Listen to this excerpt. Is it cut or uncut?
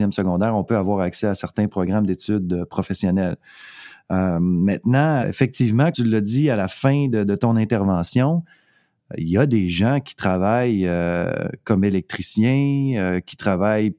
cut